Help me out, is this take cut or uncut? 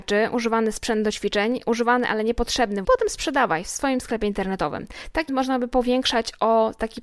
cut